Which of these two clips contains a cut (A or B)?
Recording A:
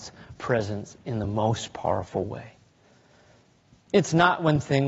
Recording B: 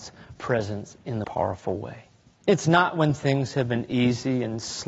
B